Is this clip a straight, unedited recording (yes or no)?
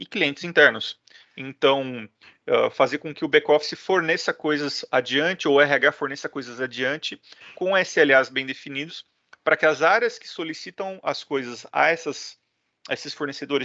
yes